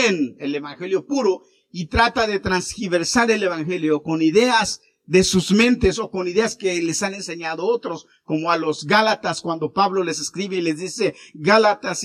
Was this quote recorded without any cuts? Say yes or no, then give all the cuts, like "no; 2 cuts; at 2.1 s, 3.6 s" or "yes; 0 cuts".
yes; 0 cuts